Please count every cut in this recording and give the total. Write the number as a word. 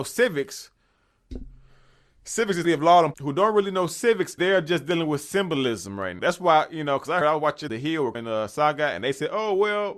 seven